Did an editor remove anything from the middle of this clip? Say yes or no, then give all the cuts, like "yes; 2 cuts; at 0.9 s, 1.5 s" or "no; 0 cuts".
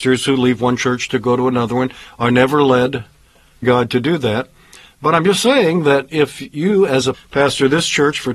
yes; 2 cuts; at 3.6 s, 7.1 s